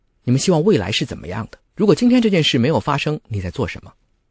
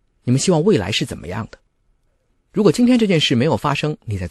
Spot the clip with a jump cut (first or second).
first